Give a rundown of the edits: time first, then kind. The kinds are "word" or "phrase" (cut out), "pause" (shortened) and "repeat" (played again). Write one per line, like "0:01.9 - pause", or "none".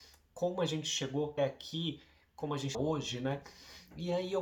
0:01.4 - word
0:02.7 - word